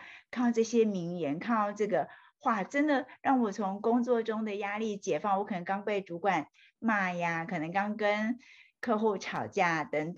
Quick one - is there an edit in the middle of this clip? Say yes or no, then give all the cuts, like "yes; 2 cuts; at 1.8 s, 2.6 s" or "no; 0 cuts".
no; 0 cuts